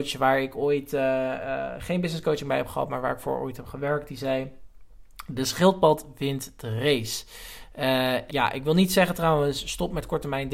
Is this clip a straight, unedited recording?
no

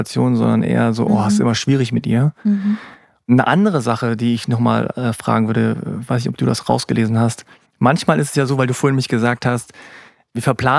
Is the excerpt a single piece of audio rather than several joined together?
no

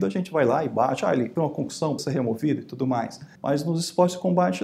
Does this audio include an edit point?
yes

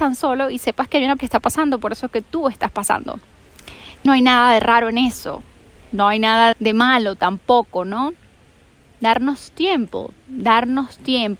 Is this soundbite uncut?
no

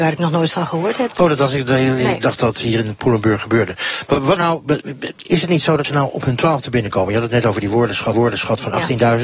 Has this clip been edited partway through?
yes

